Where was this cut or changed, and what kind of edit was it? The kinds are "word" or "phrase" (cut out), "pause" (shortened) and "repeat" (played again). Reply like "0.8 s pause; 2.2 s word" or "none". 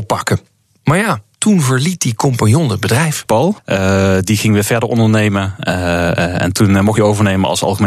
1.3 s pause; 7.0 s phrase

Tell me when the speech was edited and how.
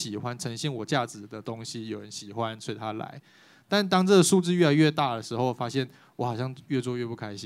none

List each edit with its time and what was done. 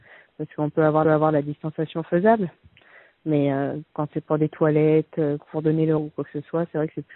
1.0 s repeat; 6.0 s word

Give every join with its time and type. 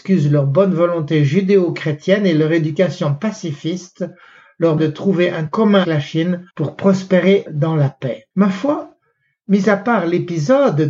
4.8 s word; 5.5 s word; 5.8 s word; 6.5 s pause; 7.5 s word; 8.3 s pause

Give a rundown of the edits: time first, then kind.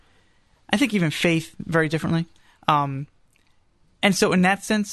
none

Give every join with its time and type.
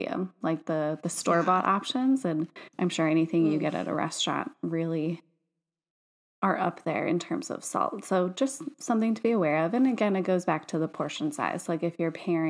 none

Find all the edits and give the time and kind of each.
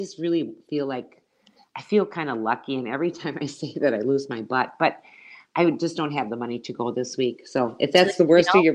none

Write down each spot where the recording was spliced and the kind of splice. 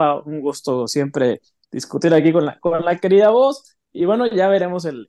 none

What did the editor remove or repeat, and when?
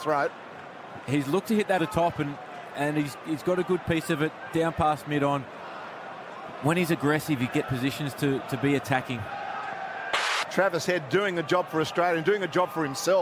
1.8 s word; 7.6 s phrase

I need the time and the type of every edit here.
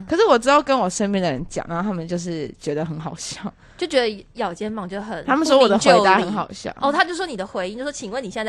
none

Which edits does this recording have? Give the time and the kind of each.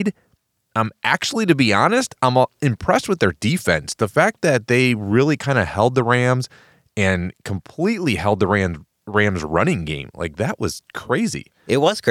none

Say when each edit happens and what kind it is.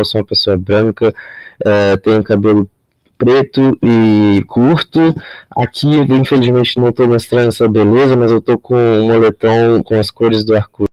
none

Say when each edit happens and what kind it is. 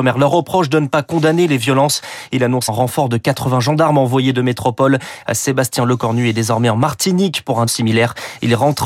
2.7 s word; 7.7 s word

